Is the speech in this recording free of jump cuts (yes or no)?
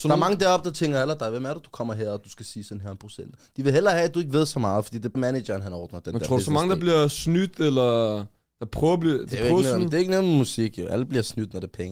no